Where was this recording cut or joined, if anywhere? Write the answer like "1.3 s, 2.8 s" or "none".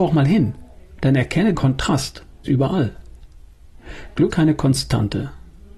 1.5 s, 2.5 s, 4.3 s

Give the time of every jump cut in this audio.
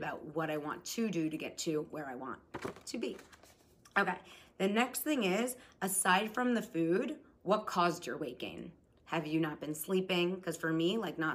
none

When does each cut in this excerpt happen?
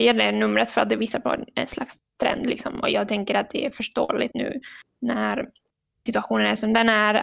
4.3 s, 6.1 s

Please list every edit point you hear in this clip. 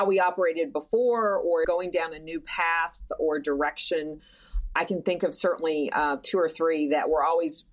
1.6 s

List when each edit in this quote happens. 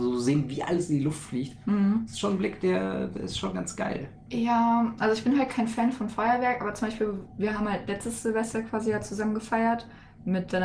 none

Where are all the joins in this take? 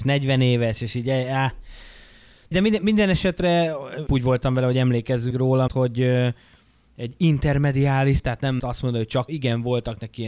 2.5 s, 4.1 s, 5.3 s, 5.7 s, 8.2 s, 8.6 s, 9.3 s

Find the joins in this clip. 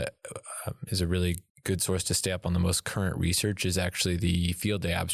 1.5 s

